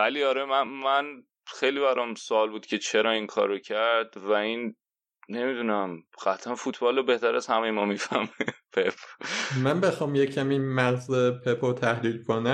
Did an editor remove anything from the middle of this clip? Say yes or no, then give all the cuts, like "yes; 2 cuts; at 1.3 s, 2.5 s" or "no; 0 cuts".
yes; 1 cut; at 6.1 s